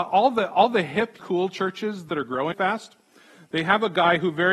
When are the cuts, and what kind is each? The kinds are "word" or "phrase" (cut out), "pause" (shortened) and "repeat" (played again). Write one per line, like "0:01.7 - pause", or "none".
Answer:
0:01.2 - word
0:02.1 - word
0:02.5 - word

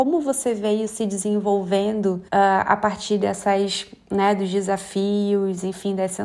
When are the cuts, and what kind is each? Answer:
0:02.3 - pause

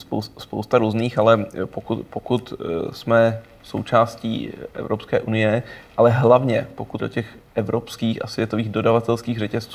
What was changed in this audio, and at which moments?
0:07.0 - phrase
0:07.5 - pause

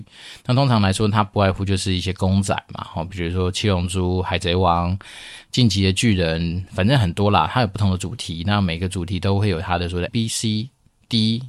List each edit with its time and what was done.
0:10.1 - word

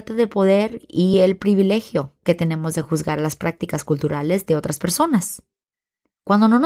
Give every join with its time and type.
none

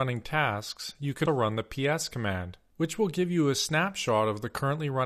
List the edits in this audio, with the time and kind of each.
0:01.3 - word

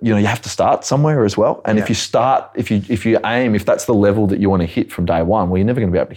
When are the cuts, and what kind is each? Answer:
none

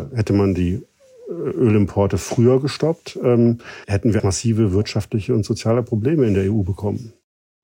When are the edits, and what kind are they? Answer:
0:03.8 - pause
0:04.2 - word

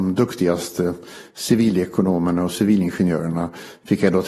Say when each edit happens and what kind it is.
none

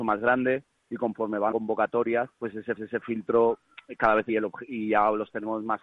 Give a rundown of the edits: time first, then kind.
0:01.5 - word
0:02.3 - pause
0:02.8 - repeat
0:04.3 - phrase

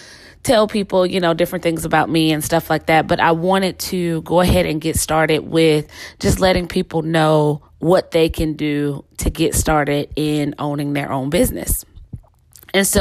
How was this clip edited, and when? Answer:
0:07.7 - pause

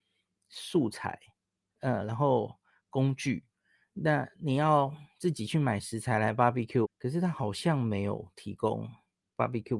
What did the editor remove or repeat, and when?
0:06.8 - phrase

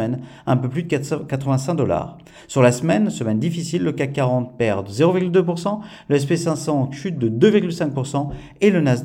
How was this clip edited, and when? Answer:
none

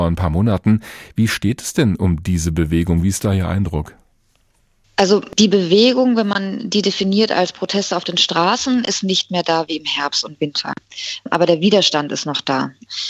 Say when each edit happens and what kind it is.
none

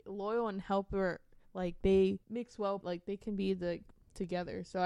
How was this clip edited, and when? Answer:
0:02.2 - pause
0:02.8 - word

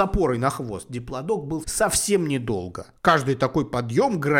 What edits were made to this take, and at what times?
0:01.6 - word
0:03.0 - pause

